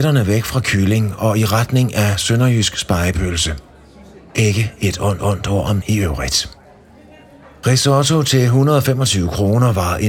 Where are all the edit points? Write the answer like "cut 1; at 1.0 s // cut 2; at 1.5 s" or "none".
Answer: cut 1; at 5.2 s // cut 2; at 5.8 s